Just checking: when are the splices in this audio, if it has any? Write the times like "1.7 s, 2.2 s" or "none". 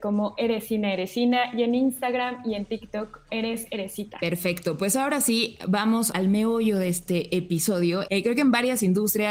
3.3 s, 6.1 s, 8.1 s